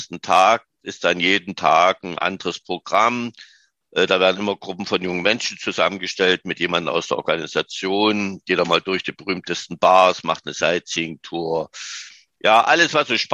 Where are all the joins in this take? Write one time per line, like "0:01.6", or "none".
none